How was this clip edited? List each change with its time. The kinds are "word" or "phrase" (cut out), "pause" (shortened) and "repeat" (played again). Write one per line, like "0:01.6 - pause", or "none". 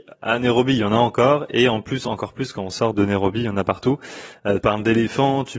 0:02.9 - word
0:04.6 - word